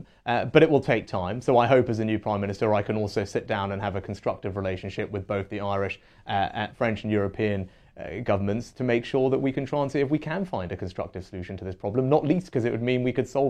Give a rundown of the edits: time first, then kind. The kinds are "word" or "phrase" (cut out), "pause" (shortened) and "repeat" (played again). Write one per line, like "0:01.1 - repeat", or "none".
none